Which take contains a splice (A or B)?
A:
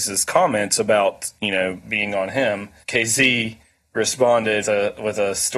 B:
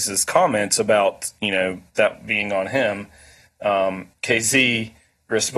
A